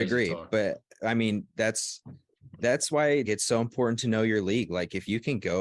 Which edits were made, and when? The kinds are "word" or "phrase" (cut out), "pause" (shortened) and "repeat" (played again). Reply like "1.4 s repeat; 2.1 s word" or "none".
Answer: 3.2 s word